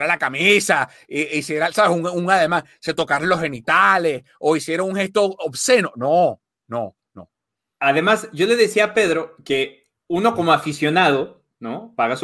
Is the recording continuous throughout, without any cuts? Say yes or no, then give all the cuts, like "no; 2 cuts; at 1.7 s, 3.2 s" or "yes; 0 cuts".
yes; 0 cuts